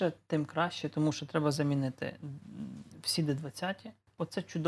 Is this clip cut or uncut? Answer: uncut